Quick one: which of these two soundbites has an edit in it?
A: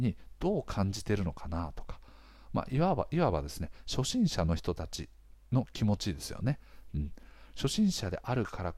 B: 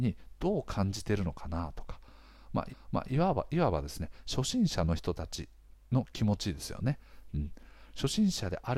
B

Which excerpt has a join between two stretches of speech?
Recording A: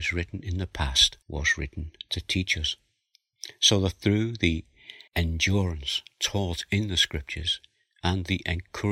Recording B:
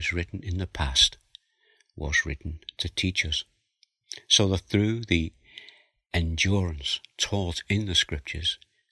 A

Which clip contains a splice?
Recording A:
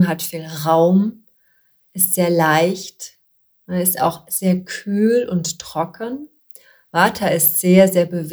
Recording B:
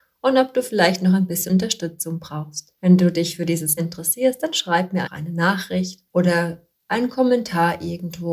B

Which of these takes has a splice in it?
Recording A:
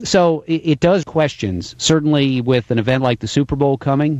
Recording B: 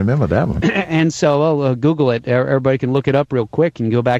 A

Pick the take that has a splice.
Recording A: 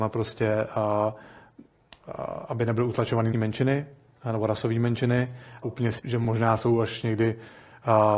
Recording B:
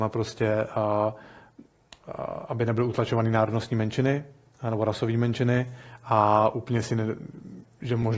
A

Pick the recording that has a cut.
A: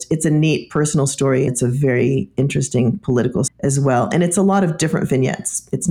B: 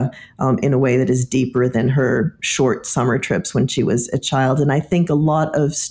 A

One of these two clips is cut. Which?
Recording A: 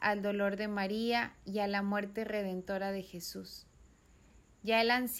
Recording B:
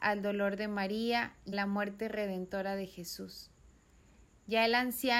B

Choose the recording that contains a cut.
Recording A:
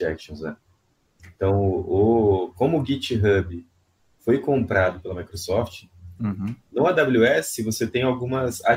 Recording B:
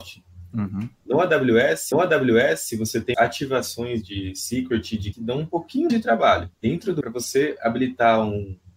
B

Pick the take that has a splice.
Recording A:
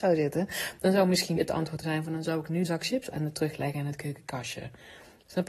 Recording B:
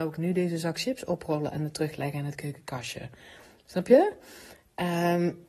A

